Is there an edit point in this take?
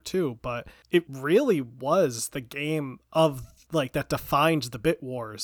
no; 0 cuts

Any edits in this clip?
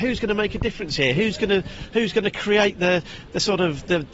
no; 0 cuts

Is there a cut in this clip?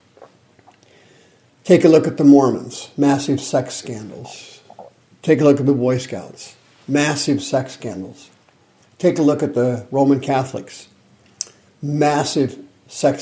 no; 0 cuts

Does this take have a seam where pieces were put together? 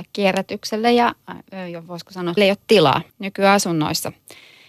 yes; 2 cuts; at 2.4 s, 3.1 s

